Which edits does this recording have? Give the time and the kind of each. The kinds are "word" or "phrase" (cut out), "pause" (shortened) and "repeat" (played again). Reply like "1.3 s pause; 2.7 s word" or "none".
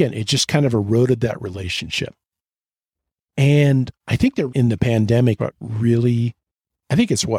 4.5 s word; 5.4 s word